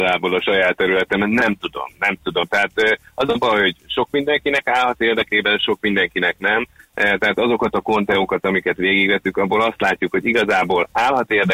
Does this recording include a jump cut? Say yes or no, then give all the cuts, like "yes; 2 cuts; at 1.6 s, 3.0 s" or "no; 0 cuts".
no; 0 cuts